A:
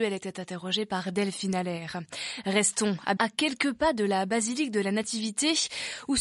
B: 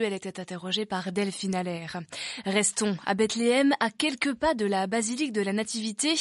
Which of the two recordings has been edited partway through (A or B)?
A